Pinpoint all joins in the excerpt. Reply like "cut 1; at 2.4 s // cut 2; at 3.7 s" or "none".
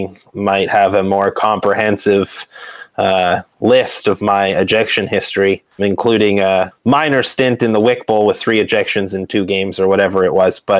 cut 1; at 5.8 s